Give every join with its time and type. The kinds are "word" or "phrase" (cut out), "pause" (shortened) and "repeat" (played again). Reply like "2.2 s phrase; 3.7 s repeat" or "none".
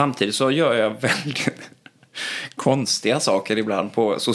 none